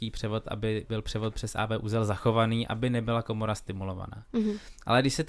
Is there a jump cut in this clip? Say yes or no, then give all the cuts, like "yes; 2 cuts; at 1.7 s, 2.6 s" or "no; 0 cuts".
no; 0 cuts